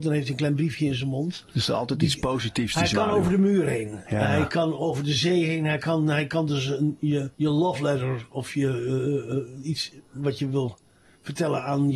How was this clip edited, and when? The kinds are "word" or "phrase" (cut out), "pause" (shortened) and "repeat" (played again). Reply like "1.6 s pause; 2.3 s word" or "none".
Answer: 7.3 s pause